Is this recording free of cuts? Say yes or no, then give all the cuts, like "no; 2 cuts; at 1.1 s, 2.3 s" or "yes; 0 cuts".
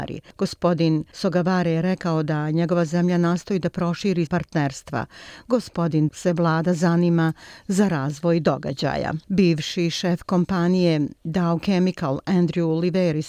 no; 3 cuts; at 4.3 s, 6.1 s, 9.2 s